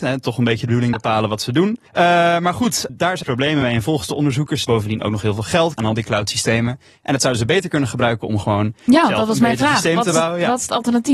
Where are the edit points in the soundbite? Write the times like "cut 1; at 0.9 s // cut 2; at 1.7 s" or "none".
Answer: cut 1; at 0.9 s // cut 2; at 1.9 s // cut 3; at 2.9 s // cut 4; at 3.2 s // cut 5; at 4.6 s // cut 6; at 5.8 s